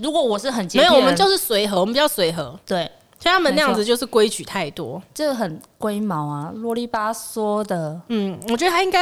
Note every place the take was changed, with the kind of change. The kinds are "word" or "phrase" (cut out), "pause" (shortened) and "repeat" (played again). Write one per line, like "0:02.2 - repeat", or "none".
none